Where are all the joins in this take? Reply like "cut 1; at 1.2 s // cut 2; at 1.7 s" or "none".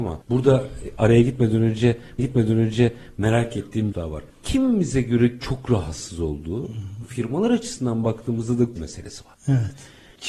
cut 1; at 2.2 s // cut 2; at 3.9 s // cut 3; at 5.4 s // cut 4; at 8.8 s

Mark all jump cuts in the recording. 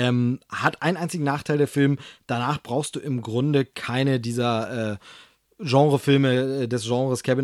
none

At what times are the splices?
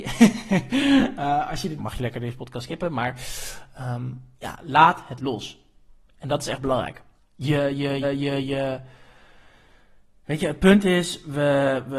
cut 1; at 1.8 s // cut 2; at 4.3 s // cut 3; at 5.2 s // cut 4; at 7.2 s // cut 5; at 8.0 s

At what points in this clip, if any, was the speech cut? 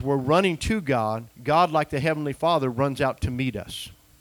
cut 1; at 1.3 s

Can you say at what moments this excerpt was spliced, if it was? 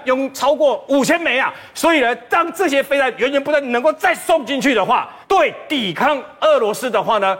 cut 1; at 5.2 s

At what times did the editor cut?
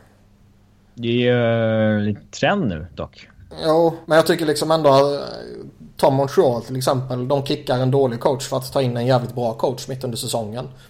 cut 1; at 4.0 s

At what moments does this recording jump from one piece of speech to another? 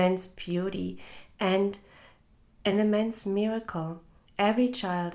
none

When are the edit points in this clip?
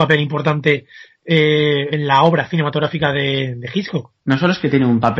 cut 1; at 4.2 s

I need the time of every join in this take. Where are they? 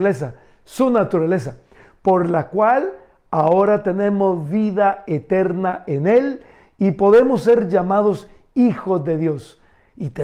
none

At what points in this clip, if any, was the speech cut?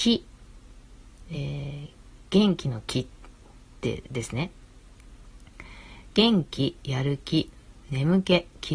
none

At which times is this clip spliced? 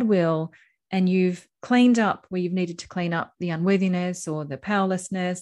none

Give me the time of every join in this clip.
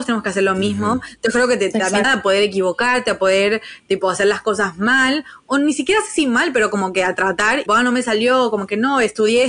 cut 1; at 2.0 s // cut 2; at 7.7 s

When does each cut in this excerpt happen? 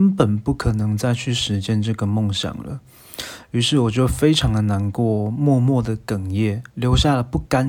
cut 1; at 6.7 s

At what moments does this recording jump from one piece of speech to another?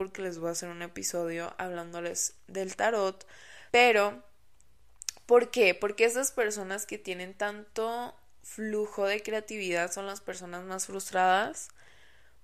cut 1; at 3.7 s

